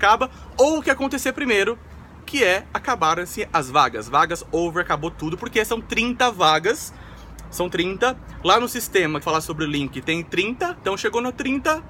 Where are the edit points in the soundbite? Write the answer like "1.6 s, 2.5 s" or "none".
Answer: 9.2 s